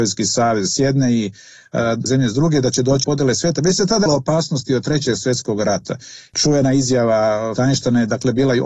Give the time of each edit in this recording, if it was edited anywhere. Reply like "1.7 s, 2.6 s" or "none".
2.1 s, 3.0 s, 4.1 s, 7.6 s